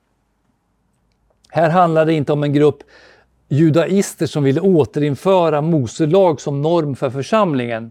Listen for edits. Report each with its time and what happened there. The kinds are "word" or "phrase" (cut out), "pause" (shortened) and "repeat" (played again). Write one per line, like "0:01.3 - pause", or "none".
none